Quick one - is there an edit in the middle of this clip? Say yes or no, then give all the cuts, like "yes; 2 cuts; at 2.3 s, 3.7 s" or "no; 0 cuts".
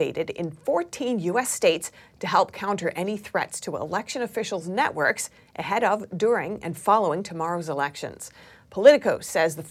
no; 0 cuts